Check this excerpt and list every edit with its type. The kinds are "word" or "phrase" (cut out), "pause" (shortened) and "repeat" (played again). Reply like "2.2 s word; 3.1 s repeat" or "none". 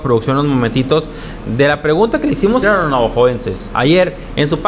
2.6 s word